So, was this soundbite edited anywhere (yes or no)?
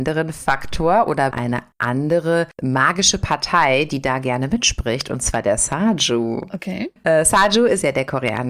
yes